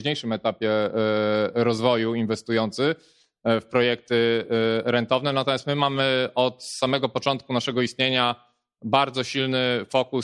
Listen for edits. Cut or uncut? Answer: uncut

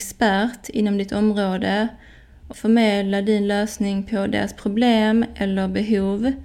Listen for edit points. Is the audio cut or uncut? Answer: cut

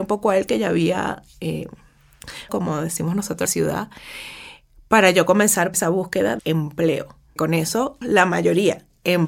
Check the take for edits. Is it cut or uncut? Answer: cut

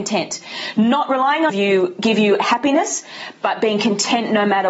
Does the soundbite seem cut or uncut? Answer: cut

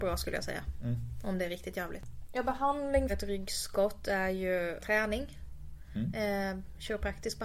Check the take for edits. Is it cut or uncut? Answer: cut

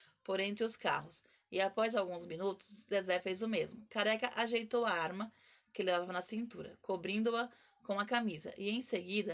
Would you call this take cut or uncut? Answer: uncut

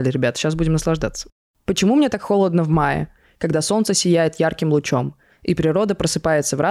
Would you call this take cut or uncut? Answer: uncut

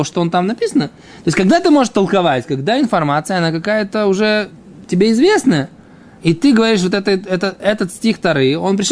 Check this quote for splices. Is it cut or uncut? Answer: uncut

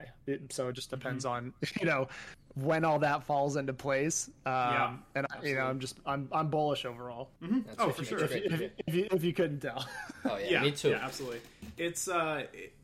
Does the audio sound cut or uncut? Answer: cut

